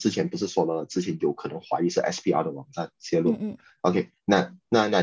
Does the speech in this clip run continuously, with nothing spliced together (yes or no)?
yes